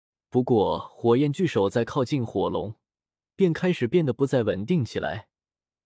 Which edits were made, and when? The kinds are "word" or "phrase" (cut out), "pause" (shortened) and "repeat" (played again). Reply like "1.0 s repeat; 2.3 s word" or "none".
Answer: none